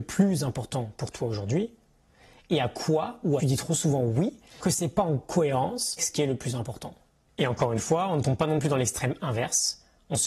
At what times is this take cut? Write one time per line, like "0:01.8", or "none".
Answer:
0:03.4
0:04.6
0:06.0
0:07.1